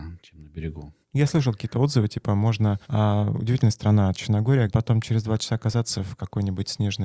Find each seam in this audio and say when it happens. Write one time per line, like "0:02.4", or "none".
0:01.0
0:02.8
0:04.7